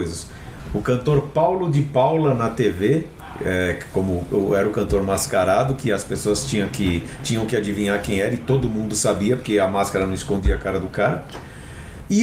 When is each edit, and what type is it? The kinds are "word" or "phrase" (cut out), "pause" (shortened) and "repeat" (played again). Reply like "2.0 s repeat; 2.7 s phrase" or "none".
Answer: none